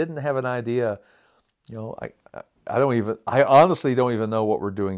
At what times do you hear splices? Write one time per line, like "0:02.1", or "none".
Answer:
none